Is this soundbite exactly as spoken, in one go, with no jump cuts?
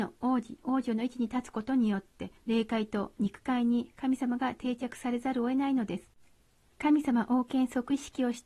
no; 1 cut; at 2.4 s

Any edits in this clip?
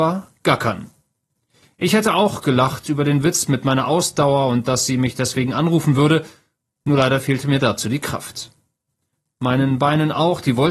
no; 0 cuts

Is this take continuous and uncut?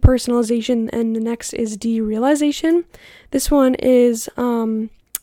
yes; 0 cuts

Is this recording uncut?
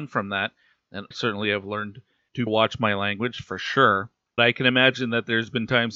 no; 3 cuts; at 1.1 s, 2.5 s, 4.4 s

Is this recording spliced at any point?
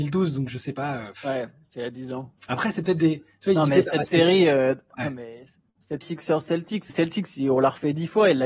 yes; 3 cuts; at 2.4 s, 6.0 s, 6.9 s

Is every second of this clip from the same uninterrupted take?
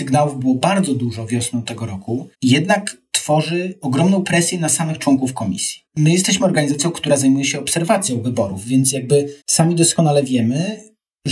no; 3 cuts; at 2.3 s, 5.9 s, 9.4 s

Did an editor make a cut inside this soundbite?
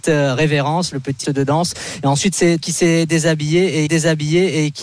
yes; 3 cuts; at 1.2 s, 2.6 s, 3.9 s

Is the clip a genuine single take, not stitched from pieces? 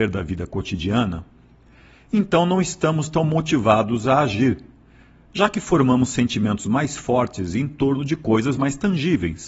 yes; 0 cuts

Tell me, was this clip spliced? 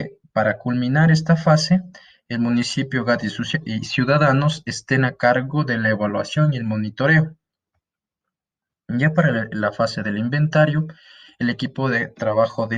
no; 0 cuts

